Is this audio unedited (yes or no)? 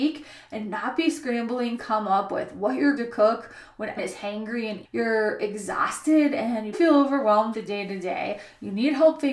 no